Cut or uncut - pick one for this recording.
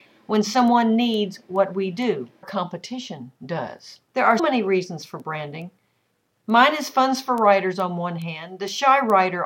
cut